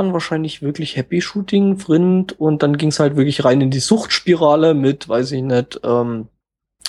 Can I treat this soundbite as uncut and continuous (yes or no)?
yes